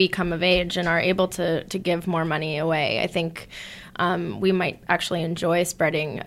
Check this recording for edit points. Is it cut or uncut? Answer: uncut